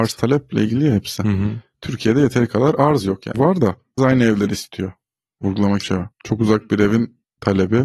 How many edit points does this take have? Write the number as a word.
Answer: four